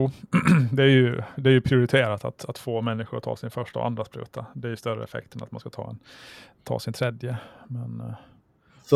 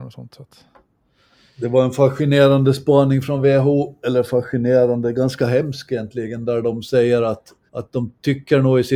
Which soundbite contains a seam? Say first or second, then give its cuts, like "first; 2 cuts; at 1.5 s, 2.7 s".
second; 1 cut; at 7.7 s